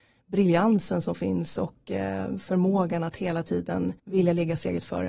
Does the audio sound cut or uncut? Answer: cut